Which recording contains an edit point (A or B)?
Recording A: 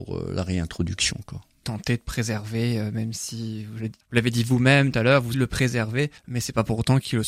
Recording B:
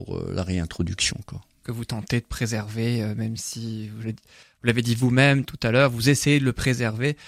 A